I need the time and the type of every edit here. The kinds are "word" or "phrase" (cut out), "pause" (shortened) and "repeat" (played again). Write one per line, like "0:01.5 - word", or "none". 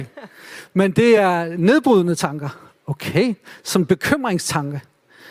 none